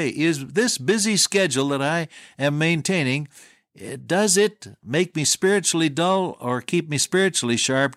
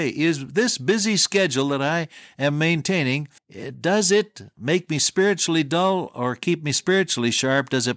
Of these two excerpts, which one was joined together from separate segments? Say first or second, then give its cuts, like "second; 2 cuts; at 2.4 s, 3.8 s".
second; 1 cut; at 3.4 s